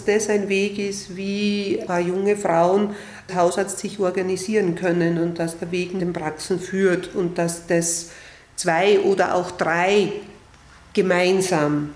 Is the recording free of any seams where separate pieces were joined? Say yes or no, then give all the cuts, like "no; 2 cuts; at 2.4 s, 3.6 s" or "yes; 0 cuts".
no; 3 cuts; at 1.9 s, 3.3 s, 6.0 s